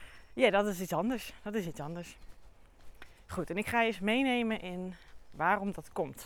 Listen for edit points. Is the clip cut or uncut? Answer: uncut